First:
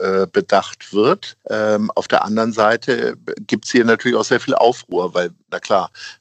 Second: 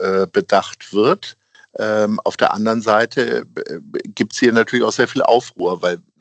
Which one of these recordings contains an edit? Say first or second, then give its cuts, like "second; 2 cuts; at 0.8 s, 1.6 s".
first; 2 cuts; at 1.4 s, 3.3 s